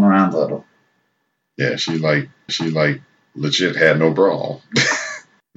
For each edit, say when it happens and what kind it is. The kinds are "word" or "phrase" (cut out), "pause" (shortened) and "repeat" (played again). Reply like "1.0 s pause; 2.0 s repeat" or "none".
2.5 s repeat